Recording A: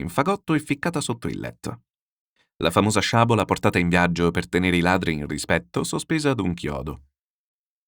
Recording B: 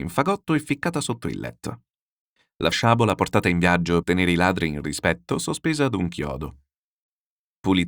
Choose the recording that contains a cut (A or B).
B